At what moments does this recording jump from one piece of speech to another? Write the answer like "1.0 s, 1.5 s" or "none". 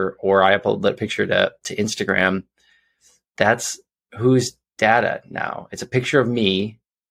none